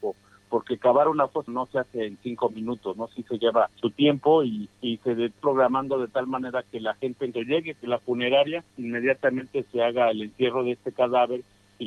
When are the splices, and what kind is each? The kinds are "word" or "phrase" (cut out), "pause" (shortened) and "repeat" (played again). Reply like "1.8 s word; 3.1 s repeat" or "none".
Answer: 1.5 s word; 3.7 s pause; 4.7 s pause; 5.4 s word; 7.3 s word; 7.8 s word; 8.7 s pause